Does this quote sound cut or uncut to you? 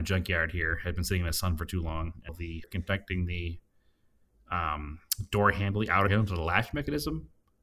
cut